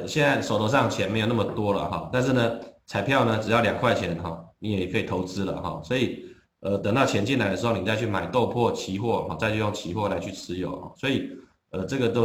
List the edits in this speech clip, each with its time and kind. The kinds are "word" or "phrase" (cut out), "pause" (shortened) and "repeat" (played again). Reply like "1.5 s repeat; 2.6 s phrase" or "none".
none